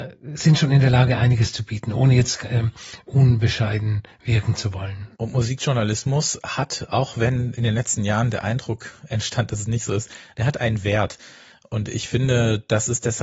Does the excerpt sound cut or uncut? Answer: cut